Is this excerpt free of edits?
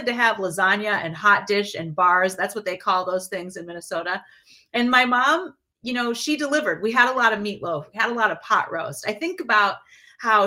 yes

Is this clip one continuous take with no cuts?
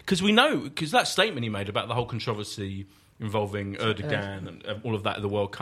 yes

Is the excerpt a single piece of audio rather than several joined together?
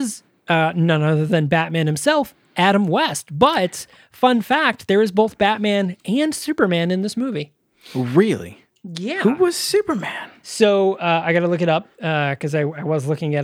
yes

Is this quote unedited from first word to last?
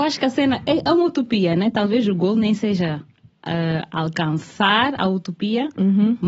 yes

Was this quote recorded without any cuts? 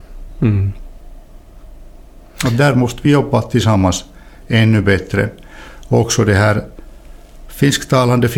yes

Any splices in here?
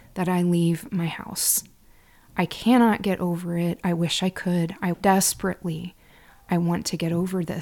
yes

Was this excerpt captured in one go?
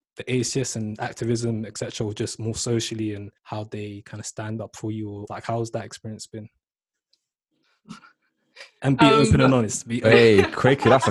no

